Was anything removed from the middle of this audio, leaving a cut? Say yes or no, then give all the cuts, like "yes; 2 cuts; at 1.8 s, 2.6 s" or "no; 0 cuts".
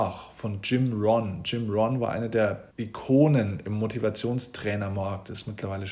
yes; 1 cut; at 2.7 s